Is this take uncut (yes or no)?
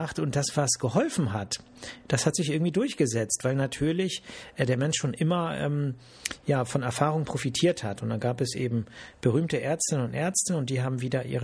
yes